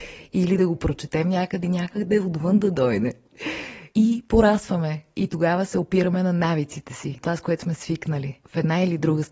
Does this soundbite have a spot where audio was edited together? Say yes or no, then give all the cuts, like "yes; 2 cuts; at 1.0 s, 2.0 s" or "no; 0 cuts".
yes; 3 cuts; at 1.6 s, 3.9 s, 7.2 s